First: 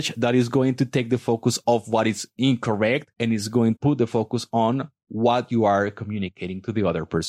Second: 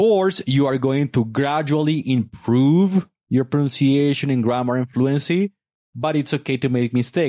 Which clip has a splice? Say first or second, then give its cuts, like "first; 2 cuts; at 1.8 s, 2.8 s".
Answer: first; 2 cuts; at 3.1 s, 3.8 s